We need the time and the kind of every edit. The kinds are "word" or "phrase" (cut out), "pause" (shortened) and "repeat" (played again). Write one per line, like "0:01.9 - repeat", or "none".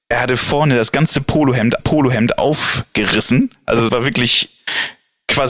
0:01.8 - repeat
0:03.9 - word

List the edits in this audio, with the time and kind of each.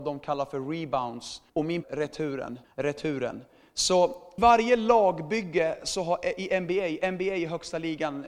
0:01.5 - pause
0:01.8 - phrase
0:02.6 - pause
0:04.4 - phrase

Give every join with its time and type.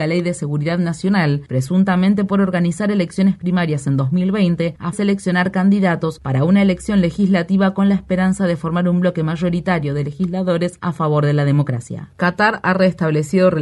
0:04.9 - phrase

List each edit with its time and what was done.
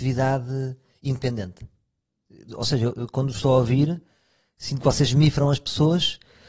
none

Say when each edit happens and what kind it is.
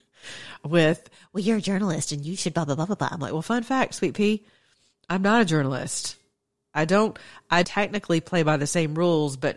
0:07.6 - word

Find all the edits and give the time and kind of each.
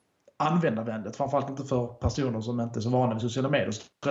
none

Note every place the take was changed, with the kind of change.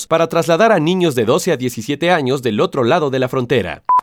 none

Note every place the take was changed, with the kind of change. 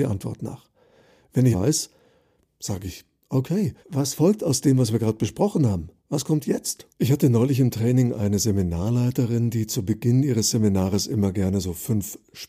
0:01.5 - phrase
0:03.8 - pause
0:06.0 - pause
0:06.9 - pause

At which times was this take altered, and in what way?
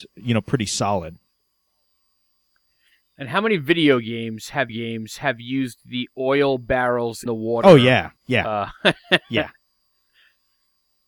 0:04.7 - repeat
0:07.3 - word
0:08.2 - pause

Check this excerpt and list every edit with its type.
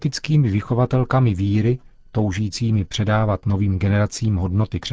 none

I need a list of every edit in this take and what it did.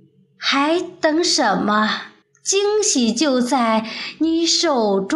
0:02.2 - pause

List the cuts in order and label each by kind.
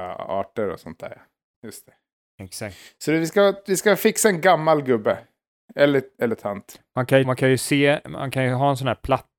0:07.2 - word

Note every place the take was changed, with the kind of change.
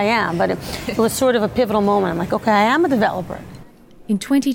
none

